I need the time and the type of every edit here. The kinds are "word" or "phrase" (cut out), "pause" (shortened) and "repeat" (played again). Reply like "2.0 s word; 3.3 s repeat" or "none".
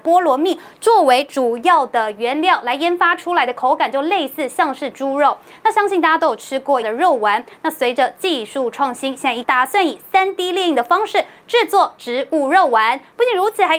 6.8 s word; 9.4 s word